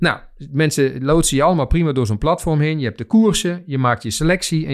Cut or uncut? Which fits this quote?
uncut